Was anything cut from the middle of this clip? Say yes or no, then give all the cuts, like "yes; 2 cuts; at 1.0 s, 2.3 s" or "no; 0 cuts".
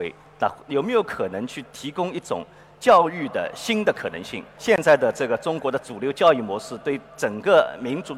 no; 0 cuts